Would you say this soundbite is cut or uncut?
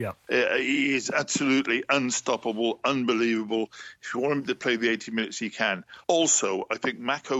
cut